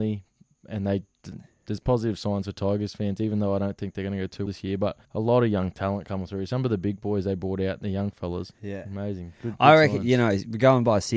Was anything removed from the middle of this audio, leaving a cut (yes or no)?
yes